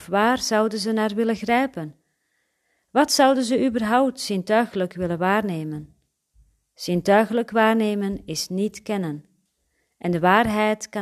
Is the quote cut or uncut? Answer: uncut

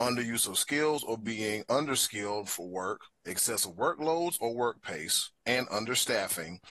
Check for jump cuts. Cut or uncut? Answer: cut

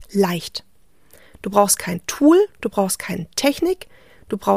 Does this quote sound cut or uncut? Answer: uncut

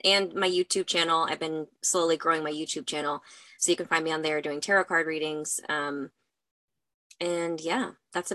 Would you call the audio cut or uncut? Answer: uncut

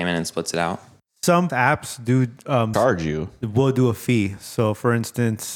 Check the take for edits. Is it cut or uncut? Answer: cut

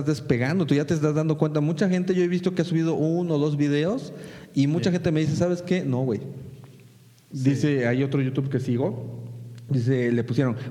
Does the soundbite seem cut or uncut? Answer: uncut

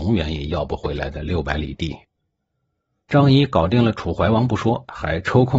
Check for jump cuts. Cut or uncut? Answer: uncut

